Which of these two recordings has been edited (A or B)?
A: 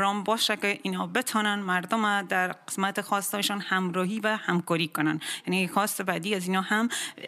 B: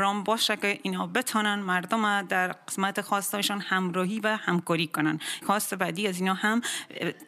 B